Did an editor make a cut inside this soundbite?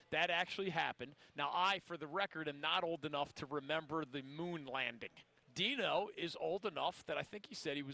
yes; 1 cut; at 5.4 s

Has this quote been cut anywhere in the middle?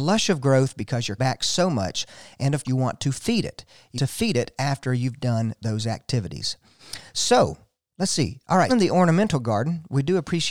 yes; 4 cuts; at 1.2 s, 2.6 s, 4.0 s, 8.7 s

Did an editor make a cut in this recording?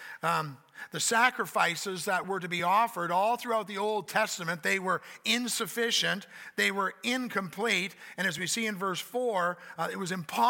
no; 0 cuts

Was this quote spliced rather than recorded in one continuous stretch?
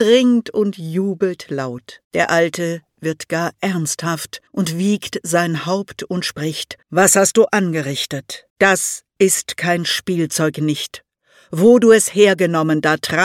yes; 4 cuts; at 2.0 s, 4.5 s, 6.8 s, 8.5 s

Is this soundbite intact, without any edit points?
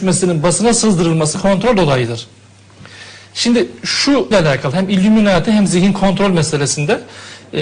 no; 2 cuts; at 1.3 s, 4.3 s

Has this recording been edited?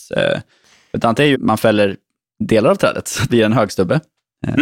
yes; 2 cuts; at 1.3 s, 3.3 s

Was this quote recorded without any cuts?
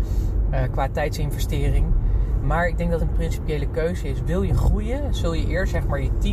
no; 1 cut; at 3.0 s

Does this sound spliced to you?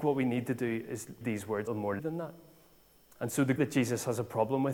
yes; 4 cuts; at 1.2 s, 1.7 s, 2.0 s, 3.6 s

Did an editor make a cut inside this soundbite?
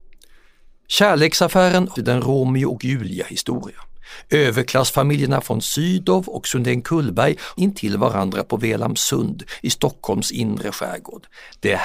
yes; 2 cuts; at 2.0 s, 7.6 s

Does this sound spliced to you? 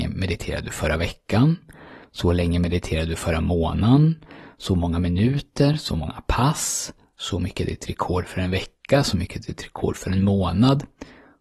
no; 0 cuts

